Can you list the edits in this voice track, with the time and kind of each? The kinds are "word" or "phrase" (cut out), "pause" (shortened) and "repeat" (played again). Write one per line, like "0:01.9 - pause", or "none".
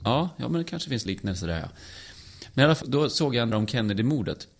0:01.1 - word
0:02.8 - word
0:03.5 - word